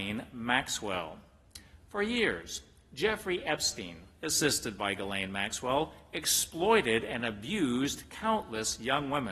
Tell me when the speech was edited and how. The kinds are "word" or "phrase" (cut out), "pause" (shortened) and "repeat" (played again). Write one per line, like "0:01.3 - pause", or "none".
none

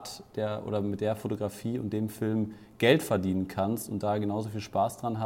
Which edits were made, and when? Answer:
none

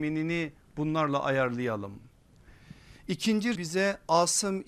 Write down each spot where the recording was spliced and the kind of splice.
0:03.6 - word

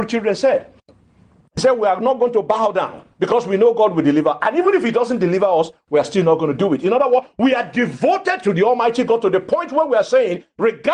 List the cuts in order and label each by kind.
0:03.1 - pause

